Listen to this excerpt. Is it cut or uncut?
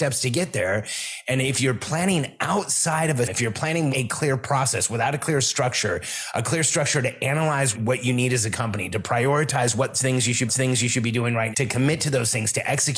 cut